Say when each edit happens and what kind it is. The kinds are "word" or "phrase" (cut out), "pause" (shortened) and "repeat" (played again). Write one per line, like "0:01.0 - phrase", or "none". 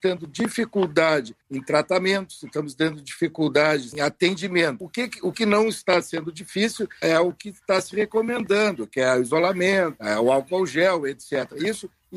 0:01.4 - pause
0:05.3 - word